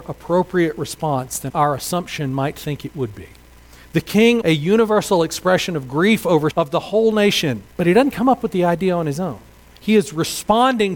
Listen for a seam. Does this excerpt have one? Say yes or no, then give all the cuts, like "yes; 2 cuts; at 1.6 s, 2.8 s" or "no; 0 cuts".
yes; 5 cuts; at 1.5 s, 3.6 s, 4.4 s, 6.5 s, 7.7 s